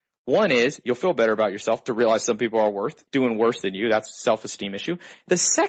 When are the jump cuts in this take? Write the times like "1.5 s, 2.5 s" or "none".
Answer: 3.1 s